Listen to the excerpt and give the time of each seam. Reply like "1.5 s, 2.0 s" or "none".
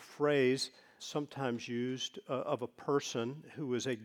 1.0 s

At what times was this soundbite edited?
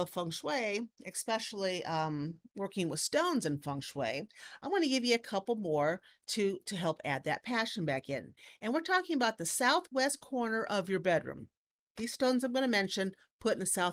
none

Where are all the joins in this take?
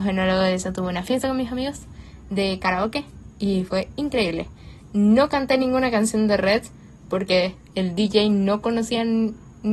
none

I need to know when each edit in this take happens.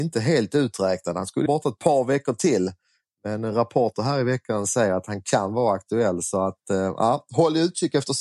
1.5 s

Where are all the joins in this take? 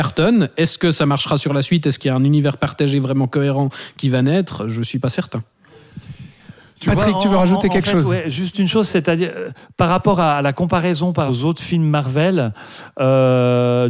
11.3 s

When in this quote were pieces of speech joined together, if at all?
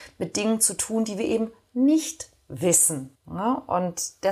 3.1 s

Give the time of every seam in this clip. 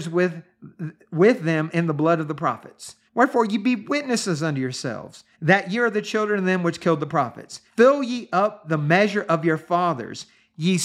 3.1 s, 5.3 s, 7.7 s

